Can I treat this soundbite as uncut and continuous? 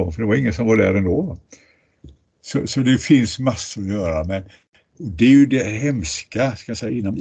yes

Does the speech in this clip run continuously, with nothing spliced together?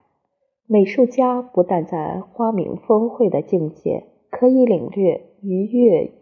yes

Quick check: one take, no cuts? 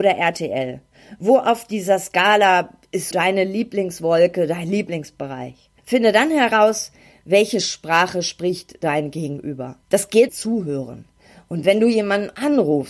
no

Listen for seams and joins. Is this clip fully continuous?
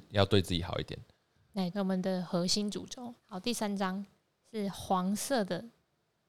no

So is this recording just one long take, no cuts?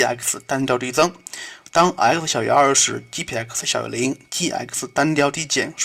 yes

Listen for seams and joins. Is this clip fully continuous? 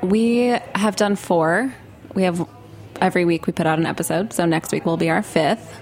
yes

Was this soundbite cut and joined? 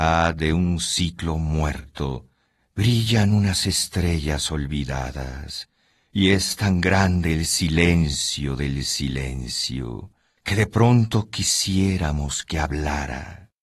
no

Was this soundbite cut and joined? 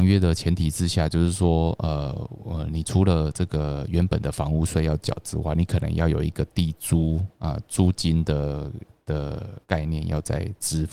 yes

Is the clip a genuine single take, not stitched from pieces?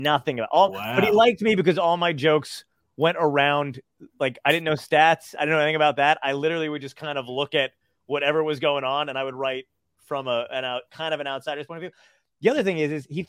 yes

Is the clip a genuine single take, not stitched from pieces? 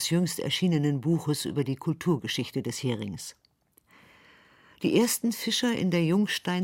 yes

